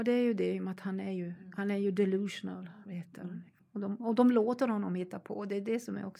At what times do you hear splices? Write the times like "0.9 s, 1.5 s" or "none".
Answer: none